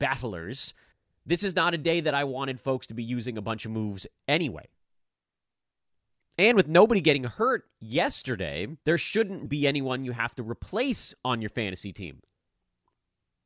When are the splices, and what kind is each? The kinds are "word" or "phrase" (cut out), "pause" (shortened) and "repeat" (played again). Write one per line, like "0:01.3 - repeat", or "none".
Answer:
0:00.9 - pause
0:08.8 - pause
0:09.5 - word